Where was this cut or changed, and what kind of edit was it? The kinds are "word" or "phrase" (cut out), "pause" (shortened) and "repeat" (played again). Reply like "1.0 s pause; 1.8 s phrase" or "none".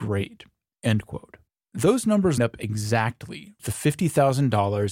1.6 s pause; 2.4 s word; 3.6 s word

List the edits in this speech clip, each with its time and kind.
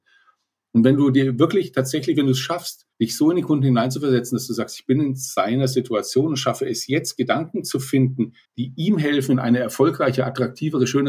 2.9 s pause; 8.4 s pause

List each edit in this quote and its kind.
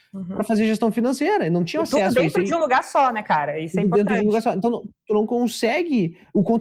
none

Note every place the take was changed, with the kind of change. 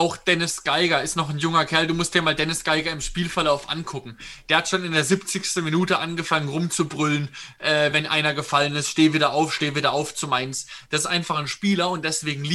none

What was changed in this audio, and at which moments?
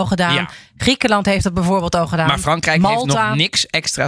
none

